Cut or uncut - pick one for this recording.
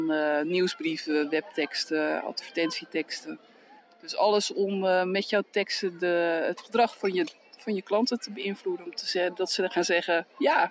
uncut